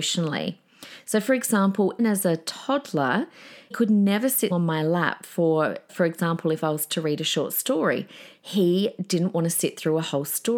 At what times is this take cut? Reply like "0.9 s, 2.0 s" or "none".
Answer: 2.0 s, 3.7 s, 4.5 s, 5.9 s